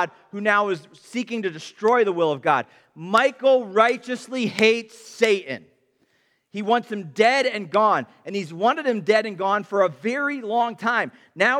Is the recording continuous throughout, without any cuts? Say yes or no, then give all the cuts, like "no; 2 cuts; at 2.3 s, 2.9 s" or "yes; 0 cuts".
yes; 0 cuts